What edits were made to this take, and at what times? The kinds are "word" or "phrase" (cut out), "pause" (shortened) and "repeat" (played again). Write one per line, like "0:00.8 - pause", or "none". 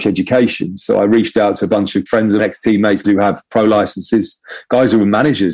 0:02.1 - word
0:02.4 - word
0:03.0 - word